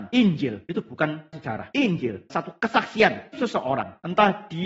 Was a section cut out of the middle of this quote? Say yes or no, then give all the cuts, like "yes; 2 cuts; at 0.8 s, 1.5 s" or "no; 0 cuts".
yes; 3 cuts; at 1.3 s, 2.3 s, 3.3 s